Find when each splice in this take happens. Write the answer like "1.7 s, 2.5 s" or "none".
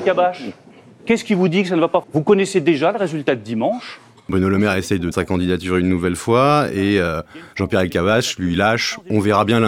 2.0 s, 5.1 s